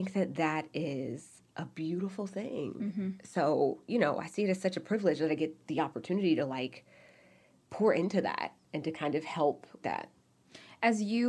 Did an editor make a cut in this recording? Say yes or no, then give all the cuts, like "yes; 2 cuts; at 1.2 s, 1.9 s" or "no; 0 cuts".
yes; 1 cut; at 9.8 s